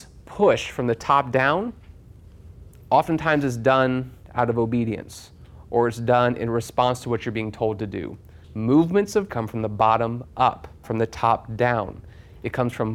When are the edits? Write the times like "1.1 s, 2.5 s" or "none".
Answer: 8.4 s, 9.3 s, 10.8 s